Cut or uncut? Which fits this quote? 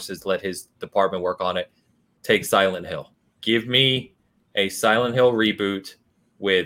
cut